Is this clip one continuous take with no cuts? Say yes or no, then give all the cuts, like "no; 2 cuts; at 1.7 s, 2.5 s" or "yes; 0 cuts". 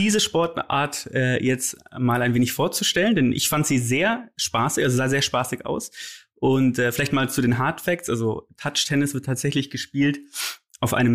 yes; 0 cuts